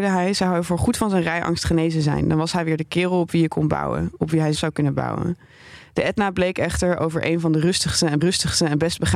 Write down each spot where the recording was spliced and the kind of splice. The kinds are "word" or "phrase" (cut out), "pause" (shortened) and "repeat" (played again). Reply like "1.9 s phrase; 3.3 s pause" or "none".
4.5 s word; 8.2 s repeat